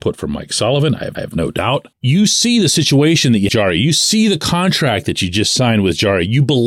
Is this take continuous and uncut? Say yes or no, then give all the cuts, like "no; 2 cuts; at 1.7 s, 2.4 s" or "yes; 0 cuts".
no; 3 cuts; at 1.1 s, 1.9 s, 3.5 s